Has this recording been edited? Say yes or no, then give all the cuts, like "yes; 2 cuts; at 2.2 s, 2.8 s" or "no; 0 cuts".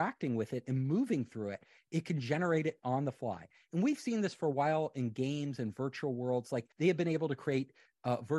yes; 1 cut; at 6.7 s